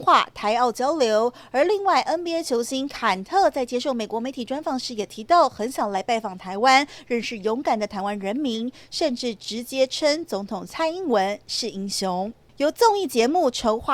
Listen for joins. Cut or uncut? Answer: uncut